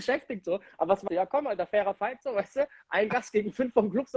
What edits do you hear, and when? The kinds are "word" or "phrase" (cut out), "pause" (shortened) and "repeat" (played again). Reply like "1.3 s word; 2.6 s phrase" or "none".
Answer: 1.1 s word